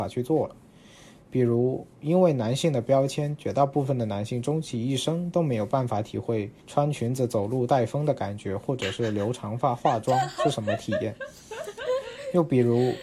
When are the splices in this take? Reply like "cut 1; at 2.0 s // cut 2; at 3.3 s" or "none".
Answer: cut 1; at 1.9 s // cut 2; at 6.6 s